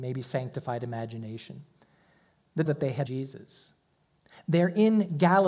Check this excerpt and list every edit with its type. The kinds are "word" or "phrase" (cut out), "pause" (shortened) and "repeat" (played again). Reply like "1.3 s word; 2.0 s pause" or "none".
2.7 s phrase; 3.1 s word